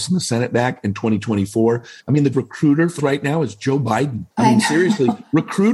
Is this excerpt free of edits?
no; 4 cuts; at 2.0 s, 2.3 s, 3.0 s, 4.3 s

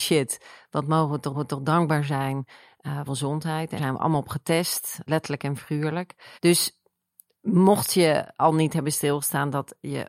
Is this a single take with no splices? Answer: no; 5 cuts; at 1.3 s, 3.1 s, 3.8 s, 5.1 s, 6.3 s

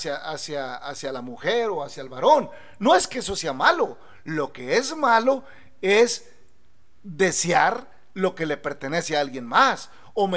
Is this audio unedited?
yes; 0 cuts

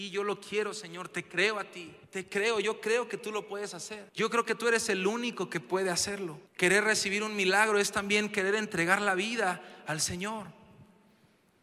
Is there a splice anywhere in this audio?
yes; 3 cuts; at 2.0 s, 4.1 s, 6.5 s

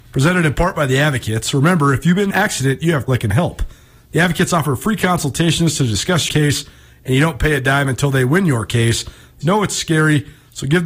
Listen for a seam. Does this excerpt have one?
yes; 4 cuts; at 2.3 s, 3.1 s, 6.3 s, 9.4 s

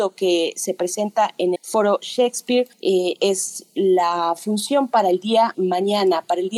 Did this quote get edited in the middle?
yes; 3 cuts; at 1.6 s, 2.7 s, 5.5 s

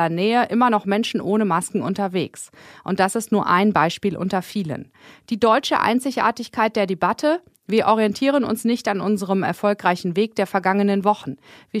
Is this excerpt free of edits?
yes; 0 cuts

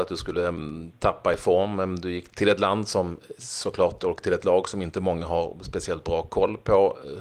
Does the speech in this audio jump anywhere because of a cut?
yes; 1 cut; at 2.3 s

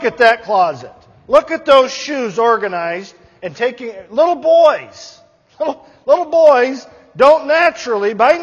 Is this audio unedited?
yes; 0 cuts

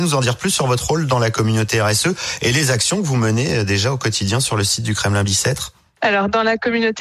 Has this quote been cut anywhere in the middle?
no; 0 cuts

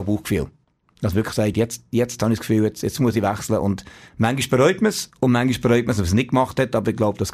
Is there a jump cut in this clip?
no; 0 cuts

